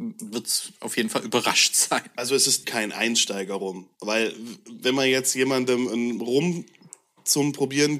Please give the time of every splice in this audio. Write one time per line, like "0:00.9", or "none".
0:02.6
0:03.9